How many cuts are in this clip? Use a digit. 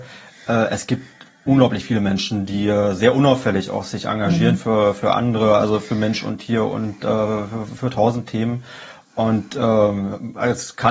0